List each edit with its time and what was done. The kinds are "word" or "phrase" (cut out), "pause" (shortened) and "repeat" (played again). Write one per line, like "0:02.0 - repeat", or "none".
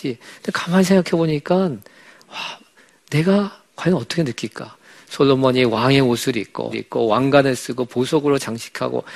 0:06.7 - phrase